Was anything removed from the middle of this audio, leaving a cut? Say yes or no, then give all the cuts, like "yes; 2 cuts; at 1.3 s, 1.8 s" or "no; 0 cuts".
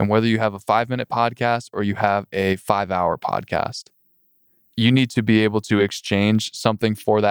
no; 0 cuts